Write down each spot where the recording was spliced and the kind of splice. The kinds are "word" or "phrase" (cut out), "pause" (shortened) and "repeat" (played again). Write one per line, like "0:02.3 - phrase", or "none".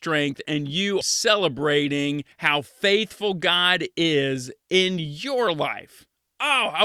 0:01.0 - word
0:02.3 - pause